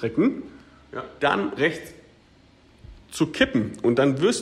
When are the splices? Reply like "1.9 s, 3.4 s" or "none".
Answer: 1.2 s, 1.6 s